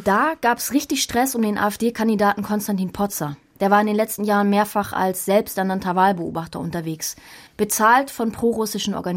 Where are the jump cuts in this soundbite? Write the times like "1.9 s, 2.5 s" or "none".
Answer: 7.5 s